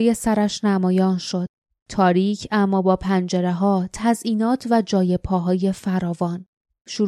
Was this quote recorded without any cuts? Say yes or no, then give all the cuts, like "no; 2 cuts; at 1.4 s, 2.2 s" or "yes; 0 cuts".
yes; 0 cuts